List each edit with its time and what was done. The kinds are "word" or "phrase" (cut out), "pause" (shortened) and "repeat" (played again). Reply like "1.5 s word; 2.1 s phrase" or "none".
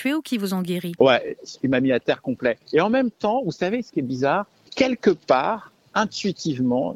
4.7 s word